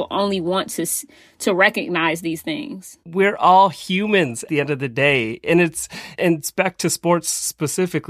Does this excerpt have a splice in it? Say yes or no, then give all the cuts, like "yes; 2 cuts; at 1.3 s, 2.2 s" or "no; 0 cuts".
yes; 2 cuts; at 4.5 s, 6.1 s